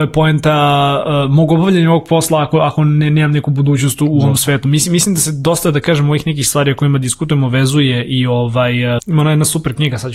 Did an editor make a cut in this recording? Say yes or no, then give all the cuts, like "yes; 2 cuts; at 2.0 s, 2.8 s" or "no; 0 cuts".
yes; 1 cut; at 9.0 s